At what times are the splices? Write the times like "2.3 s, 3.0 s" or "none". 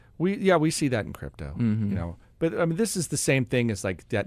none